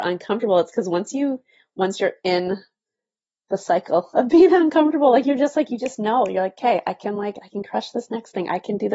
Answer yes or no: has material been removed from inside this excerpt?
no